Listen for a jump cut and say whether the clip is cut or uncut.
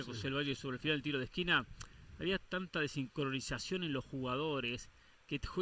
uncut